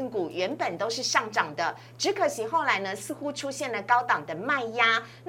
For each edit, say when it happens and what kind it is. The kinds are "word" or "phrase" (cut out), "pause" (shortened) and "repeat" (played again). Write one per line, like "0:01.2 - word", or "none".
none

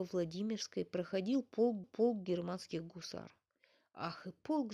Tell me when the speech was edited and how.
0:01.8 - repeat

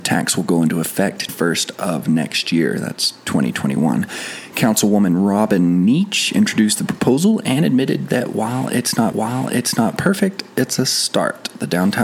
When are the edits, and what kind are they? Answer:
0:01.3 - word
0:09.1 - repeat

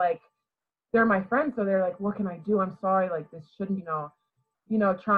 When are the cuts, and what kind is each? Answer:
0:02.8 - word
0:03.8 - phrase

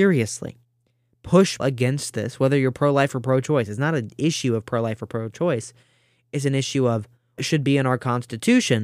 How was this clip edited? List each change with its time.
0:01.6 - word
0:07.4 - word

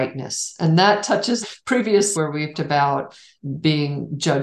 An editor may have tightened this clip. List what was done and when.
0:01.4 - word
0:02.1 - word
0:02.5 - word

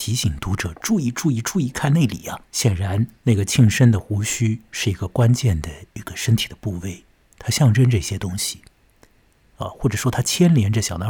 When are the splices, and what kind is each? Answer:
0:02.5 - pause
0:03.2 - pause

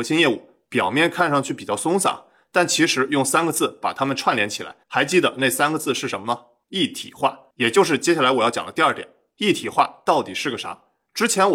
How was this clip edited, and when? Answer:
0:04.8 - pause

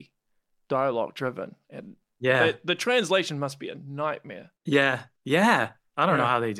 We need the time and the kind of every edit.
0:04.6 - pause

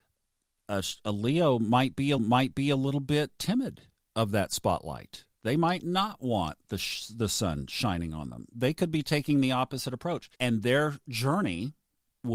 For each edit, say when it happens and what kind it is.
0:02.2 - repeat
0:03.4 - word
0:10.3 - pause

